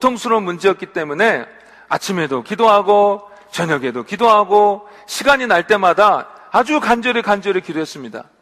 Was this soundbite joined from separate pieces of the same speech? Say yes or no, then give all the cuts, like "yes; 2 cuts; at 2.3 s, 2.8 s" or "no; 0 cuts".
no; 0 cuts